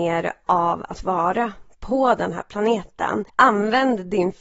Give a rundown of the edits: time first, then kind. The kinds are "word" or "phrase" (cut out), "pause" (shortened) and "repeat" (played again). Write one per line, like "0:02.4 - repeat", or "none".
0:03.3 - pause